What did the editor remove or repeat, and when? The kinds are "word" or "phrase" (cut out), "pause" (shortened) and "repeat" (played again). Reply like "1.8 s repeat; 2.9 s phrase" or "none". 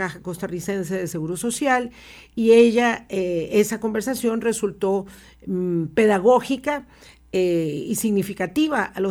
none